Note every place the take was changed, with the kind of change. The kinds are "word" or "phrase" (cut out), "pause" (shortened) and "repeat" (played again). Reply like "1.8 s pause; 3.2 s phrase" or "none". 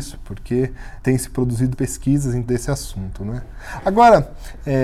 1.0 s word; 1.7 s word; 2.5 s word